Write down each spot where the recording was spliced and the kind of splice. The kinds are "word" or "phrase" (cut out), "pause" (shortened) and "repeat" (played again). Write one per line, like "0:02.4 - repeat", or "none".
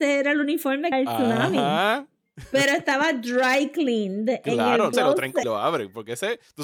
0:00.9 - phrase
0:04.9 - word
0:05.4 - phrase